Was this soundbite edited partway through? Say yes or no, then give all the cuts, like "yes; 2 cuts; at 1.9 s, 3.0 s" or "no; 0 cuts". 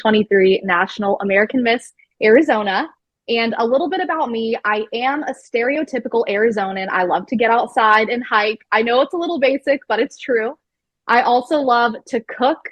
no; 0 cuts